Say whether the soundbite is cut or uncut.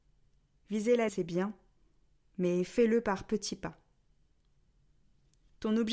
cut